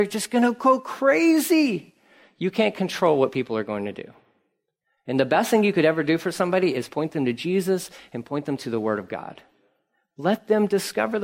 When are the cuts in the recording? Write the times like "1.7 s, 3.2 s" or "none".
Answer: none